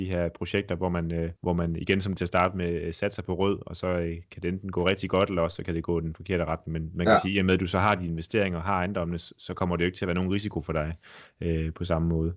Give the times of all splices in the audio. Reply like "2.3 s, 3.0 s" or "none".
1.4 s, 2.2 s